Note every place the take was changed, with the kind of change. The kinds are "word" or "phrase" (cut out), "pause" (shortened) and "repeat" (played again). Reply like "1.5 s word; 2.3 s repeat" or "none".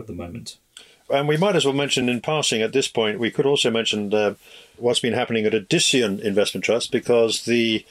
none

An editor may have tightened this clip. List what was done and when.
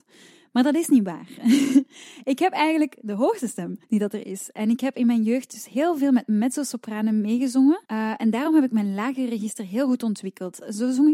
3.8 s pause; 7.9 s pause

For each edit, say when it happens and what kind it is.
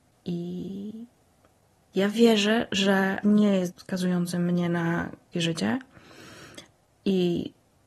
3.2 s word; 3.7 s word; 5.3 s word

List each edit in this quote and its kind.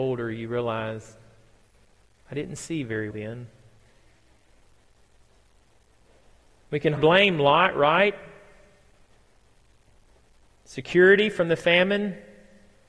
3.1 s word; 7.0 s word

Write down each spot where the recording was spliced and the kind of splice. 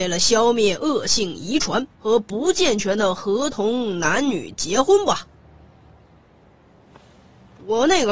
1.9 s pause

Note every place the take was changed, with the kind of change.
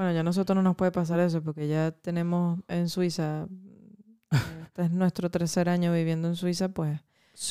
none

